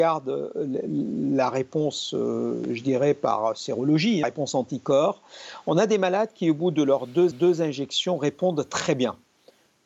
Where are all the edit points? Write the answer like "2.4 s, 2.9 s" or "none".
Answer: 4.2 s, 7.3 s